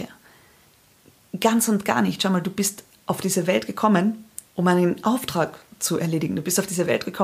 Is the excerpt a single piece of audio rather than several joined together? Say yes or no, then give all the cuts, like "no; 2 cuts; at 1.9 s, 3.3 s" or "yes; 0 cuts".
no; 1 cut; at 4.5 s